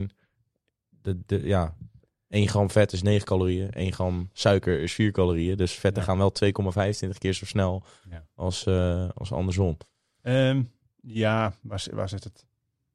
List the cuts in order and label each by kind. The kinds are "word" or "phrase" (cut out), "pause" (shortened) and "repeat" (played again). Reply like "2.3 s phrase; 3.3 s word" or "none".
none